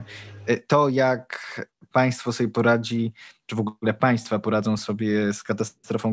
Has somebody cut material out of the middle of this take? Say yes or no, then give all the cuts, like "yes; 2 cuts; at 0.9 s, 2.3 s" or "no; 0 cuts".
no; 0 cuts